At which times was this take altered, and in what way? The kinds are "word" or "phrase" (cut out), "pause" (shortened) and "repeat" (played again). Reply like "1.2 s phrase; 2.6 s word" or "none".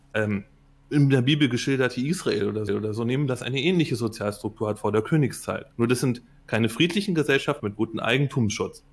2.7 s repeat; 5.7 s pause; 7.6 s phrase